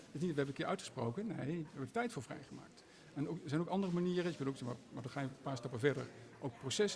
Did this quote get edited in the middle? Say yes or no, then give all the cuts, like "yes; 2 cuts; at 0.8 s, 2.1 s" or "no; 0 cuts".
no; 0 cuts